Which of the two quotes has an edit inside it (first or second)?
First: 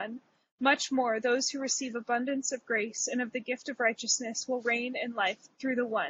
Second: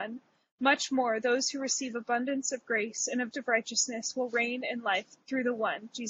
second